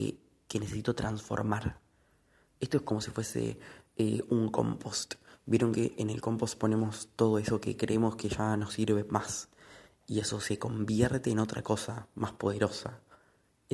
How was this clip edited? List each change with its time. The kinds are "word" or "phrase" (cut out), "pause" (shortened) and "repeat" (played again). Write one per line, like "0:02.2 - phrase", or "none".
none